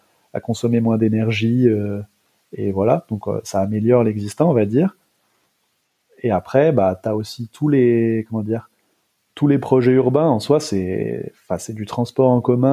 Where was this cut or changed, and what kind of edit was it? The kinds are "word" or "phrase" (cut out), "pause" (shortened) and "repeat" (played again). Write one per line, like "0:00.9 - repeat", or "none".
none